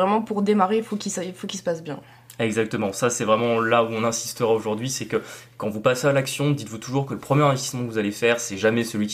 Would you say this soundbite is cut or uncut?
uncut